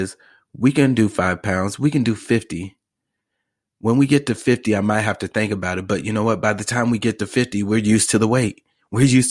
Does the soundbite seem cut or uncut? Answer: uncut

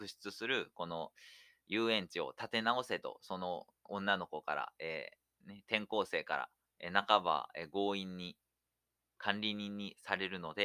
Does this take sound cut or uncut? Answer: uncut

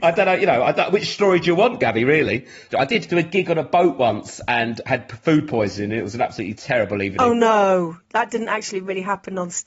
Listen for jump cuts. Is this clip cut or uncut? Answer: uncut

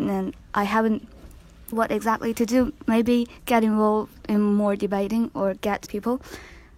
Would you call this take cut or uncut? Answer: cut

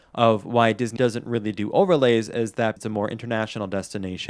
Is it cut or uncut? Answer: cut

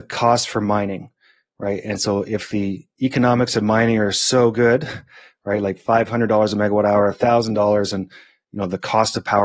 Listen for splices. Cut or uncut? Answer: uncut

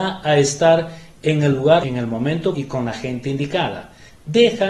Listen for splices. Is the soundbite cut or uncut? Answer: cut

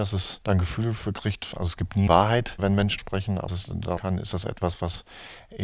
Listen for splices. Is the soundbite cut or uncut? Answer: cut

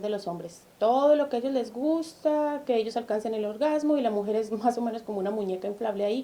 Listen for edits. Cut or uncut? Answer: uncut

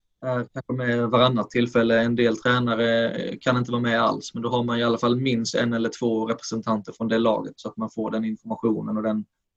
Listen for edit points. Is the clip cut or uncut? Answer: uncut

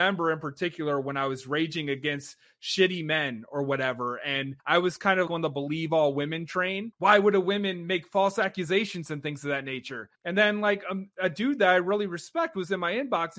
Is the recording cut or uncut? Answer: cut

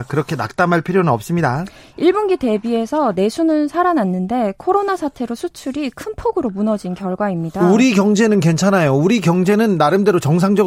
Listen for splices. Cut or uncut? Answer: uncut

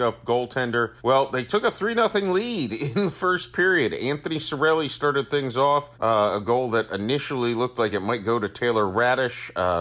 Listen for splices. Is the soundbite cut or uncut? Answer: cut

